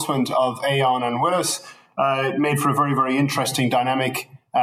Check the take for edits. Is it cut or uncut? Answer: uncut